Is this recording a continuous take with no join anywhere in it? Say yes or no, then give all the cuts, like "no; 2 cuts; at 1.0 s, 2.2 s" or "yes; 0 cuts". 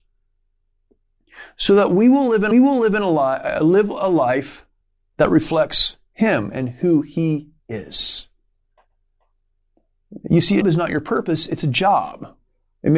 no; 3 cuts; at 2.5 s, 4.8 s, 10.6 s